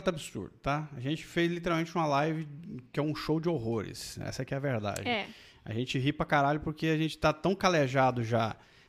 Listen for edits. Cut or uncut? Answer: uncut